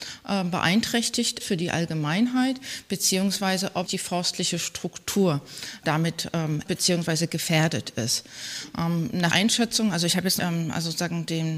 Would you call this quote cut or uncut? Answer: cut